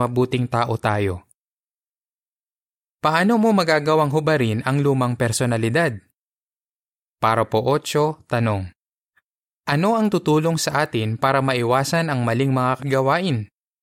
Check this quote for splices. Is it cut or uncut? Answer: cut